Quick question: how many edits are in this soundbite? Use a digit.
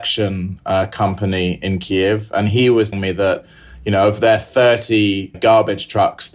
3